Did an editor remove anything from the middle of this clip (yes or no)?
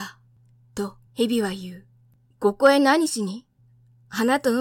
yes